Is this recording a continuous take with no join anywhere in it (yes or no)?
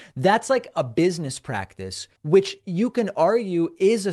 no